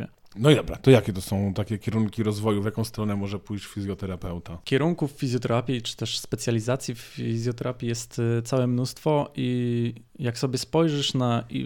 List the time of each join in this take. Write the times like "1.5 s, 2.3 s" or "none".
10.1 s